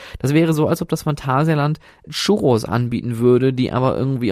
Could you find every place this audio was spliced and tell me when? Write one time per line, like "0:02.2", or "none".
0:02.0
0:02.7

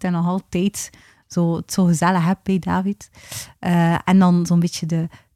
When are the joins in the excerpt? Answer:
none

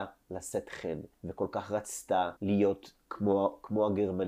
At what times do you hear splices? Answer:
0:01.1
0:02.4

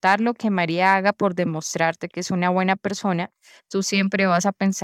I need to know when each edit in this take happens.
none

